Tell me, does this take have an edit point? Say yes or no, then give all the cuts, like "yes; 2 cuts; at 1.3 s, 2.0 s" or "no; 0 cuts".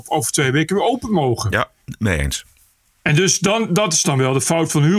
no; 0 cuts